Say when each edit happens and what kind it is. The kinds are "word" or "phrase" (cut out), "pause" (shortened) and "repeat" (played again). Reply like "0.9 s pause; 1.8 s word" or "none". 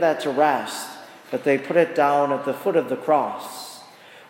none